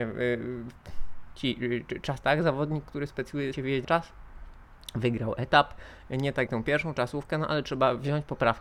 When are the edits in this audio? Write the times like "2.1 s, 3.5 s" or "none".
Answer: 2.2 s, 3.5 s, 3.8 s, 6.5 s